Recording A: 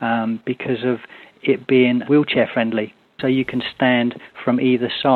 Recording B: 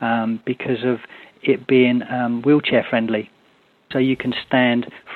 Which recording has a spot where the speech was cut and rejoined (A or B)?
A